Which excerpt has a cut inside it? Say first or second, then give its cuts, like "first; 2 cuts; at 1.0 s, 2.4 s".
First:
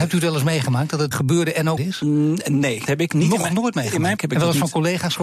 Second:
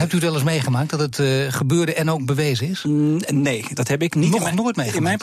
first; 4 cuts; at 1.1 s, 1.8 s, 2.9 s, 4.2 s